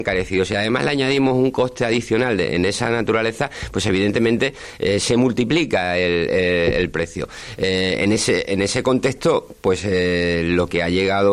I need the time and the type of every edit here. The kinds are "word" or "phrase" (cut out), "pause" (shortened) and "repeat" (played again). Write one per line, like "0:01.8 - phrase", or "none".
none